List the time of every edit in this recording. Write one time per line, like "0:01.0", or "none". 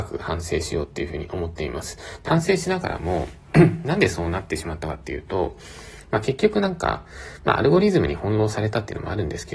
0:02.3

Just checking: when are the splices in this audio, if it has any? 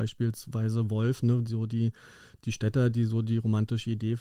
none

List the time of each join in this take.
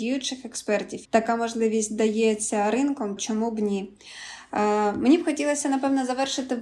0:01.0
0:03.2

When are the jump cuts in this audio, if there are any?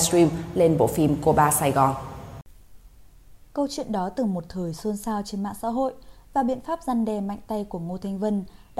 0:03.4

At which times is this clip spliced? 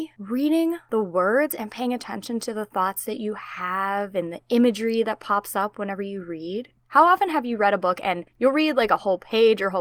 0:06.8

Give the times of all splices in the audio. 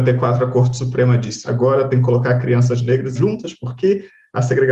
0:01.4
0:03.1

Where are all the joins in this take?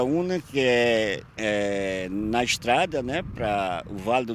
0:01.3

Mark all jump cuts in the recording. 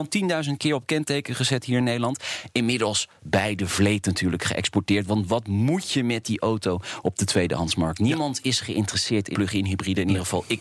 0:09.3

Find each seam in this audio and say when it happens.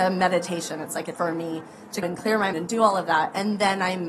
0:01.1
0:02.0
0:02.5

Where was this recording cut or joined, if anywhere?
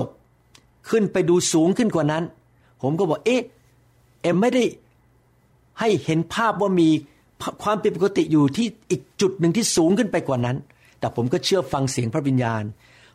0:04.3

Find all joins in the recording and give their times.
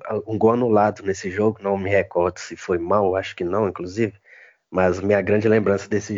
none

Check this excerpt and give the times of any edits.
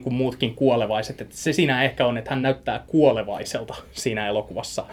none

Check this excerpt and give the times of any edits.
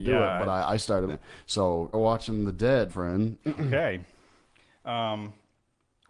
0:01.1
0:01.9
0:02.9

